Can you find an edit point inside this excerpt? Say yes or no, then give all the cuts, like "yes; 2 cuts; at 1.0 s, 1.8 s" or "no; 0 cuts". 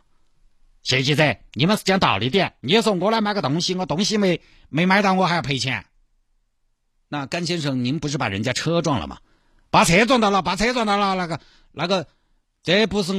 yes; 1 cut; at 2.6 s